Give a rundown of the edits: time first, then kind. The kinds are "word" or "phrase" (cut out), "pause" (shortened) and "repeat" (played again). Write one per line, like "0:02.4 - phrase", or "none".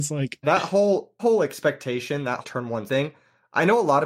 0:01.2 - word
0:02.4 - word
0:02.9 - word